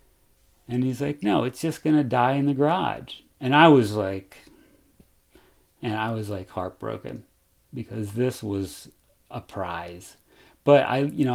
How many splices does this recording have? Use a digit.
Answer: 0